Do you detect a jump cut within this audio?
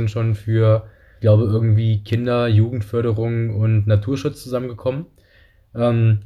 yes; 1 cut; at 1.2 s

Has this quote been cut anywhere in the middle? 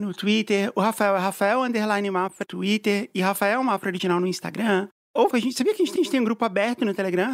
yes; 3 cuts; at 2.4 s, 5.3 s, 6.0 s

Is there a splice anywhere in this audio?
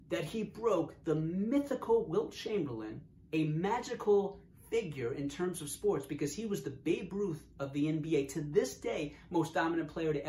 no; 0 cuts

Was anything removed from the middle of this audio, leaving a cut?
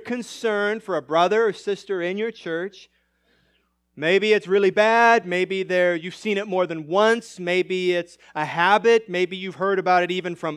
no; 0 cuts

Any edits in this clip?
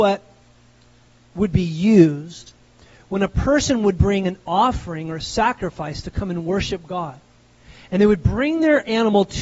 no; 0 cuts

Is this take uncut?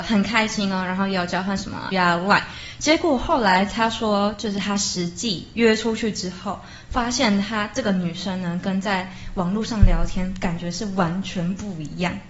no; 1 cut; at 1.9 s

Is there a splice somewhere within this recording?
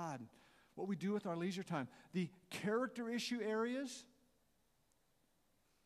no; 0 cuts

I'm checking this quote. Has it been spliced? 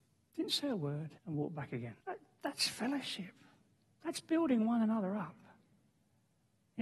yes; 2 cuts; at 1.2 s, 2.0 s

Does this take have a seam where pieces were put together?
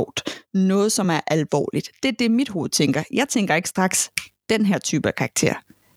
no; 0 cuts

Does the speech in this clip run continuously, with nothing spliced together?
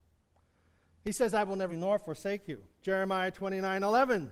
no; 1 cut; at 1.7 s

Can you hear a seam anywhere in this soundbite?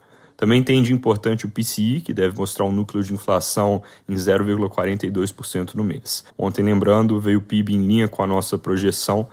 yes; 1 cut; at 6.3 s

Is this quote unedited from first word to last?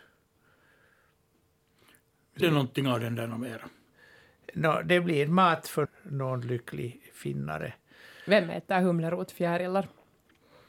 no; 2 cuts; at 2.4 s, 5.9 s

